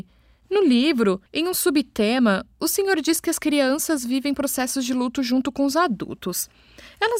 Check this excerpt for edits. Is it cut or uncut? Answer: cut